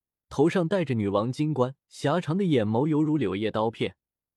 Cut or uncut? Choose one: cut